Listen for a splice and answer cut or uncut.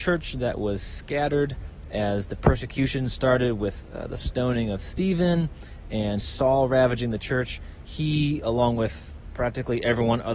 uncut